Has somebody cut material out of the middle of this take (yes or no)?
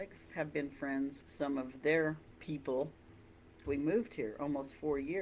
yes